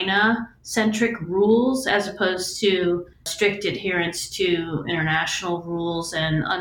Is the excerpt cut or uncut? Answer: cut